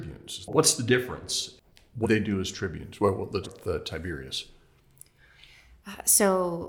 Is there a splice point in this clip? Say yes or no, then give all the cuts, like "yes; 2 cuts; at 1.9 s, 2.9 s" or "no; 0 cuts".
yes; 2 cuts; at 2.0 s, 3.4 s